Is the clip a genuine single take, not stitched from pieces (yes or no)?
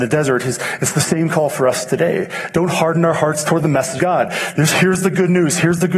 no